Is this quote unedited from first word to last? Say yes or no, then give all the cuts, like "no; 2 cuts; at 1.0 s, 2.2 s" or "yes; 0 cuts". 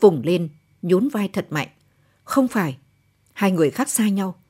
yes; 0 cuts